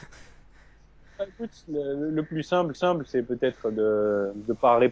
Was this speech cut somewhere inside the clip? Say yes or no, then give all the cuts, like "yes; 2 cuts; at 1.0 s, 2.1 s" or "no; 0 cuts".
yes; 1 cut; at 2.7 s